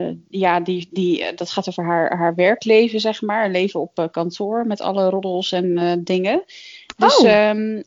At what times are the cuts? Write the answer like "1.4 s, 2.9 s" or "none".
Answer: none